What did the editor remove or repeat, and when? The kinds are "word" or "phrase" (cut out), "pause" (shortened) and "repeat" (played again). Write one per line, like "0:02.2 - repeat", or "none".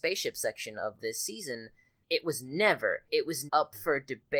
0:01.0 - word
0:02.0 - word
0:03.1 - word
0:03.5 - word

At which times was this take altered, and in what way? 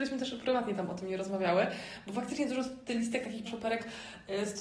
0:03.5 - word

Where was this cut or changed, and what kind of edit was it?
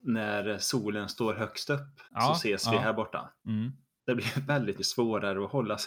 0:02.1 - pause
0:03.4 - pause
0:04.5 - word
0:04.8 - word

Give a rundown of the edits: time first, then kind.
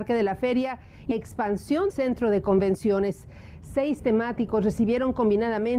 0:01.1 - word
0:01.9 - word
0:04.0 - word

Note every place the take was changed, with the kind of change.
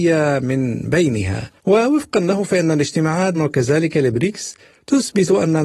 0:01.6 - pause
0:03.3 - phrase

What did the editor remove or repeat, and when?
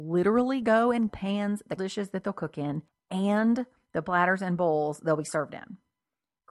0:01.1 - phrase
0:01.8 - word
0:02.9 - pause

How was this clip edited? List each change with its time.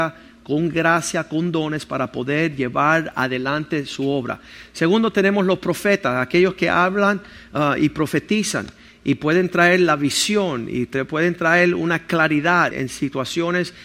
0:12.7 - word

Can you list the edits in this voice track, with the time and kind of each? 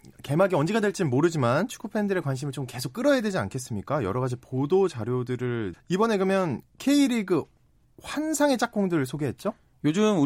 0:05.7 - word

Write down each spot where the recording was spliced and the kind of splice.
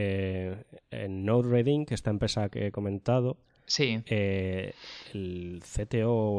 none

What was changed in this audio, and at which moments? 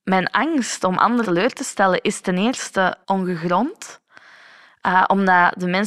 0:01.2 - word
0:03.0 - pause

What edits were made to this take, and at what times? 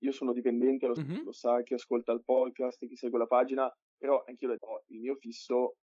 0:01.0 - word
0:04.6 - word

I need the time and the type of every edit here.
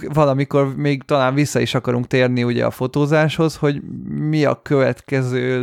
none

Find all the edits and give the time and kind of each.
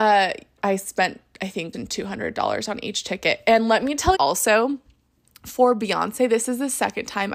0:01.7 - word
0:04.1 - word

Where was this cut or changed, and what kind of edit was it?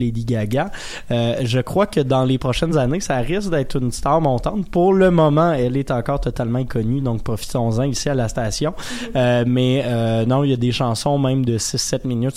none

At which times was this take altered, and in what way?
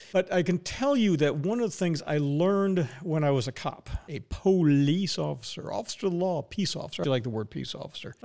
0:07.0 - word

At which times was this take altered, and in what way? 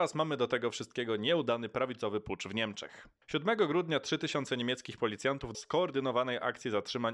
0:03.2 - pause
0:05.5 - word

